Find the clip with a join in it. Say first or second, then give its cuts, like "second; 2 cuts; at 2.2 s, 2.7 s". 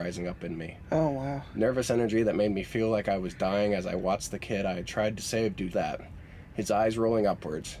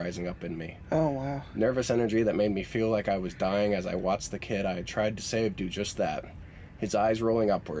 first; 1 cut; at 5.7 s